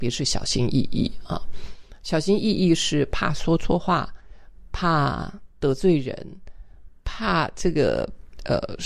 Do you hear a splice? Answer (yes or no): yes